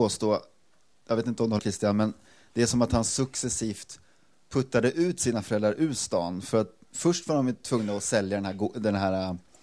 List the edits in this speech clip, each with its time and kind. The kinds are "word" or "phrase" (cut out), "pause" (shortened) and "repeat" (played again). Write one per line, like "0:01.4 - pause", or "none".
0:01.6 - word

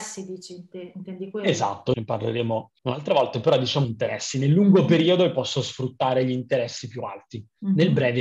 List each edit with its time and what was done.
0:01.9 - phrase
0:02.8 - pause
0:03.8 - phrase

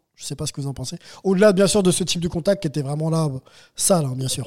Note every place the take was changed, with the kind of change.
none

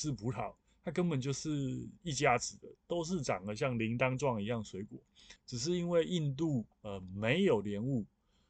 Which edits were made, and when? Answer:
0:05.4 - pause
0:06.7 - pause

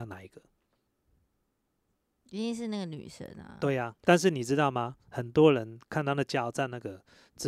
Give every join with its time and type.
0:04.0 - pause

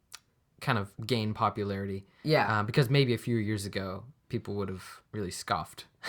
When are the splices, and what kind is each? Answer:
0:01.0 - pause
0:05.1 - pause

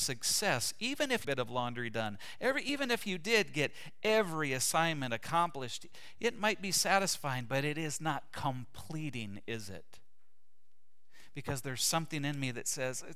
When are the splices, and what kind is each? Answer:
0:01.2 - phrase

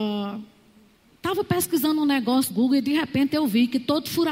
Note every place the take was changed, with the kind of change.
0:02.5 - word

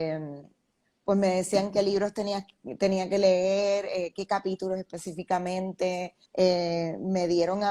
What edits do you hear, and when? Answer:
0:06.3 - pause

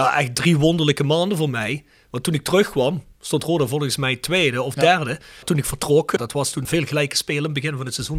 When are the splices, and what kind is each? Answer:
none

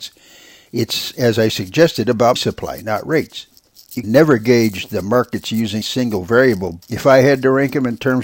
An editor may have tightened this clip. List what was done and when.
0:02.4 - word
0:04.0 - word
0:05.8 - word
0:06.8 - word

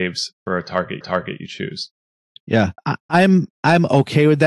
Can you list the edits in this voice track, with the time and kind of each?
0:01.0 - repeat
0:02.8 - pause

